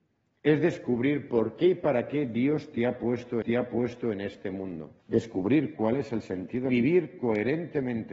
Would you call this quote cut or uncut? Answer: cut